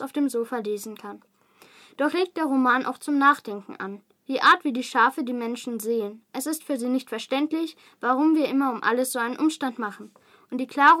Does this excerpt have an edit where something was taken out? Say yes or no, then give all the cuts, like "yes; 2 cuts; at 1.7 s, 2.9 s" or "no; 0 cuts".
no; 0 cuts